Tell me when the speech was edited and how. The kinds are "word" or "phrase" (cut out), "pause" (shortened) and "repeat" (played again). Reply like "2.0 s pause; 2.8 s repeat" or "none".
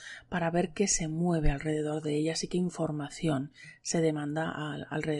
none